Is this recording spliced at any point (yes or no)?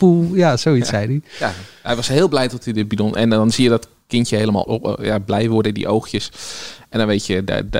yes